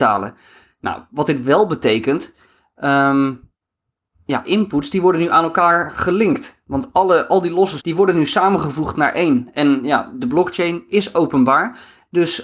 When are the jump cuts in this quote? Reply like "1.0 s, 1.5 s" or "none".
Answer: 4.4 s, 7.8 s